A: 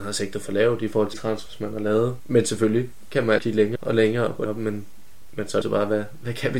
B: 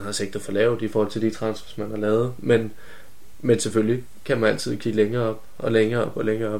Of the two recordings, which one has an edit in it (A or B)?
A